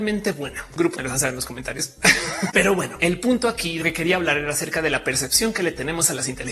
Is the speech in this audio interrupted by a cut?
yes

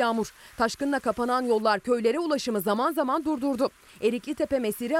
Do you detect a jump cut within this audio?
no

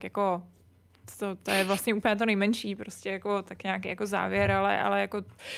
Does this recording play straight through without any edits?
yes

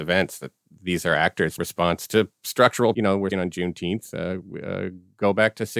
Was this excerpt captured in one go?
no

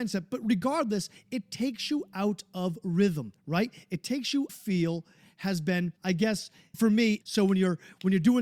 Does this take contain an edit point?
yes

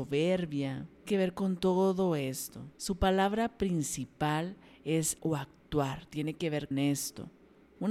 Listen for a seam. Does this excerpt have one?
yes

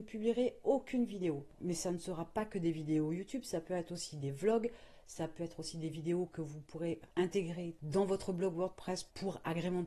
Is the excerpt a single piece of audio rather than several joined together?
yes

